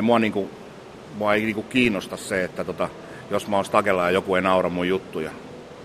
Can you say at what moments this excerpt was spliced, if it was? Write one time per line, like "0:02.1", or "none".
none